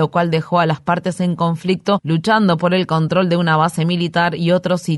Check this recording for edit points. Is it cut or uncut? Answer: uncut